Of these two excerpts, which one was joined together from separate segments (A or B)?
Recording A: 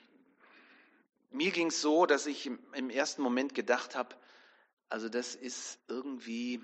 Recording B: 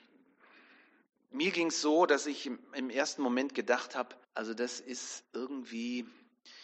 B